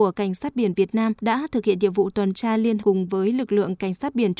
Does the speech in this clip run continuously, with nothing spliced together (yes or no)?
no